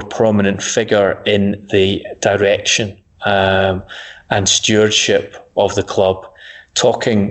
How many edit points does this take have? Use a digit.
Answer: 0